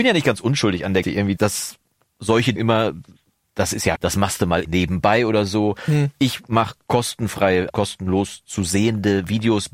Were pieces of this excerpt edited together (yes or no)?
yes